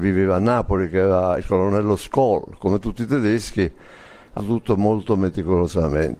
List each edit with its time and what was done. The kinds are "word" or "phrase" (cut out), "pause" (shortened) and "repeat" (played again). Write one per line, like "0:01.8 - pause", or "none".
0:04.4 - word